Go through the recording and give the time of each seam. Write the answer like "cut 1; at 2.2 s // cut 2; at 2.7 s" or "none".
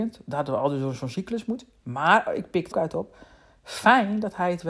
cut 1; at 2.7 s